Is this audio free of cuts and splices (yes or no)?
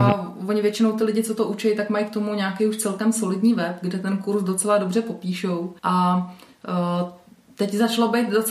no